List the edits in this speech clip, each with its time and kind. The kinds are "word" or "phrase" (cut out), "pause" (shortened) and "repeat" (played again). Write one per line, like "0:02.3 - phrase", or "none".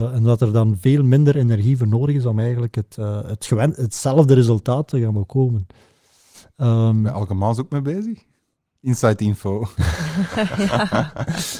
none